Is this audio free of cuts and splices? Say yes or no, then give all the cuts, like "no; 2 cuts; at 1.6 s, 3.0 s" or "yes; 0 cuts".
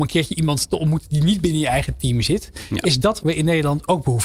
no; 1 cut; at 3.2 s